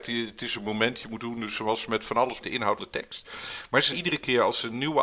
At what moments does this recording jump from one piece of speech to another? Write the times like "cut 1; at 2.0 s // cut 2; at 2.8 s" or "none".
cut 1; at 1.2 s // cut 2; at 2.4 s // cut 3; at 2.8 s // cut 4; at 3.9 s